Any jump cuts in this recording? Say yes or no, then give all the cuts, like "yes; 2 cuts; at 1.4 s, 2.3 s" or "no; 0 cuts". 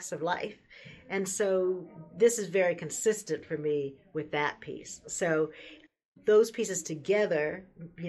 no; 0 cuts